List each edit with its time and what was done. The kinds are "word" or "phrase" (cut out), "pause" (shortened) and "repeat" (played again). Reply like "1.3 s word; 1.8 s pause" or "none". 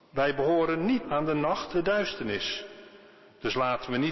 1.0 s word; 1.7 s word